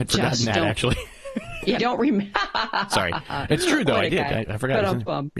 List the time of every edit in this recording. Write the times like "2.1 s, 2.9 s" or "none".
1.8 s